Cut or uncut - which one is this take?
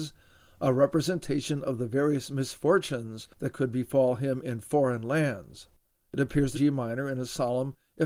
cut